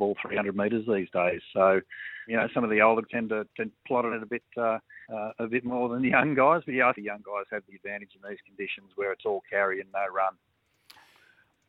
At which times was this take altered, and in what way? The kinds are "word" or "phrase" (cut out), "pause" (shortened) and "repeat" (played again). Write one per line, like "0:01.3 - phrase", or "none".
0:02.3 - word
0:03.0 - word
0:04.1 - phrase
0:05.0 - pause
0:06.9 - word